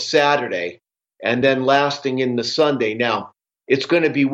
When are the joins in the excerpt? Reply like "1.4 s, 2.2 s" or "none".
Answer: none